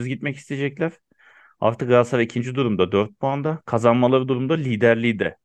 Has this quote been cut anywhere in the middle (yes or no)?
no